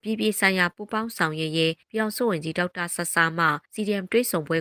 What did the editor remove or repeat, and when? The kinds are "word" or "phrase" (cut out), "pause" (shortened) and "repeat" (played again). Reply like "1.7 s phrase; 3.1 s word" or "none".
1.8 s pause; 3.6 s pause